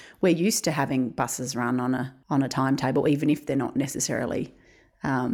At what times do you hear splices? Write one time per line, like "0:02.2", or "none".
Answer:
none